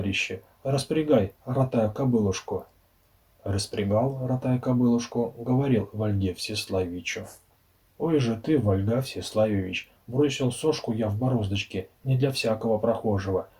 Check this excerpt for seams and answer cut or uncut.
uncut